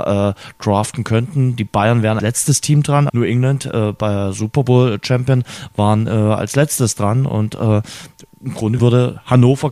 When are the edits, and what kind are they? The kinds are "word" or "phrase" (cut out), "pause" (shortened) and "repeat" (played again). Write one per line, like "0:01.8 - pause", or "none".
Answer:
0:02.2 - word
0:03.1 - word
0:08.8 - word